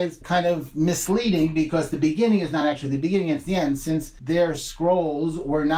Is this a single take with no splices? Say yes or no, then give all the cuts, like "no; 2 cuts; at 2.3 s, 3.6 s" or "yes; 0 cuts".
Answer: yes; 0 cuts